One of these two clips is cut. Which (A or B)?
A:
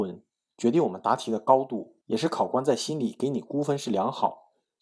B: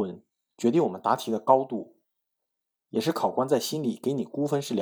A